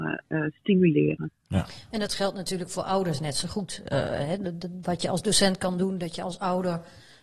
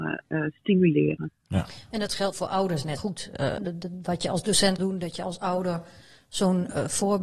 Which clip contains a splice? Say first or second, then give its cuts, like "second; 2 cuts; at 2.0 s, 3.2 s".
second; 4 cuts; at 2.3 s, 3.0 s, 3.6 s, 4.8 s